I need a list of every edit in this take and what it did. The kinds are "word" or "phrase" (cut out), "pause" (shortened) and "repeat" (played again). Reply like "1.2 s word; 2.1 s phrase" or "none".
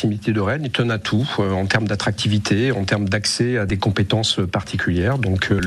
none

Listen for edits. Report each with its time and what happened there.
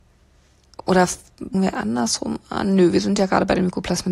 1.5 s word

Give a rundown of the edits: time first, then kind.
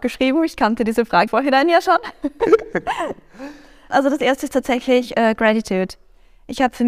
1.3 s word; 3.9 s word

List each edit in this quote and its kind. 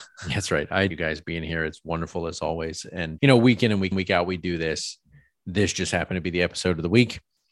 0.9 s phrase; 3.2 s word; 3.9 s repeat

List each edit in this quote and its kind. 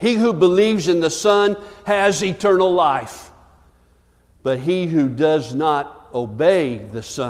none

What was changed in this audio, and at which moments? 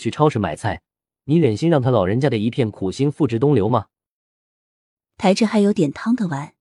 none

